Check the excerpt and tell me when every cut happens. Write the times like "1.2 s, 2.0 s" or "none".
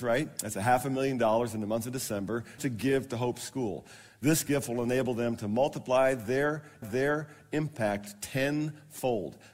2.6 s, 6.8 s